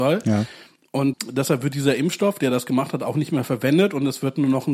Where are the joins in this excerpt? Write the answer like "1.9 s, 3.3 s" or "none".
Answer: 1.1 s